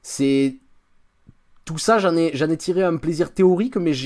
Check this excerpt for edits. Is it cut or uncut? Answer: uncut